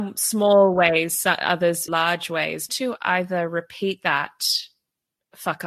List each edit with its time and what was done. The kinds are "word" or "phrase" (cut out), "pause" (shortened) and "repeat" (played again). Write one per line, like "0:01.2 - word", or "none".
0:01.9 - word
0:02.7 - phrase

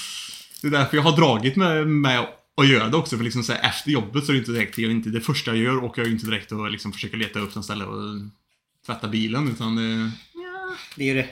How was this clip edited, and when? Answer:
none

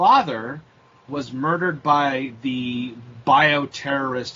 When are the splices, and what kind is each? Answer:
0:01.1 - word

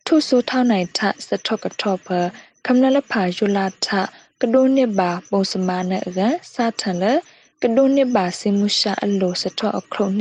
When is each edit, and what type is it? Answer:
none

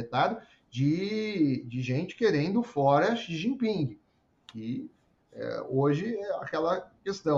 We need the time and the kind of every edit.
none

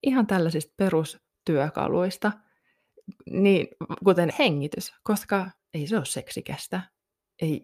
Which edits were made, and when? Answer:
0:04.3 - word
0:05.6 - pause

